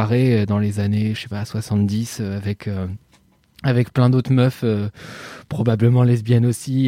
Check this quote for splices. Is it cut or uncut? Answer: uncut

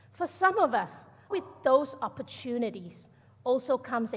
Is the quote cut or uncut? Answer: cut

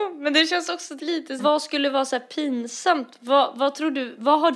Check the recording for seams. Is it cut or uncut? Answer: cut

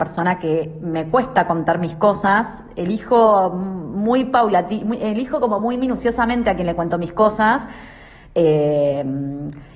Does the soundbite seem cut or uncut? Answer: uncut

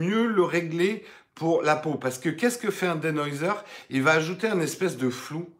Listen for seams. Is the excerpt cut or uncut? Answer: uncut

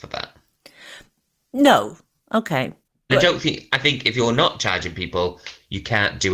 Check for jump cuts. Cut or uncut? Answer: cut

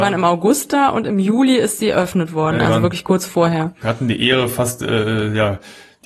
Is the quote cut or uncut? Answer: uncut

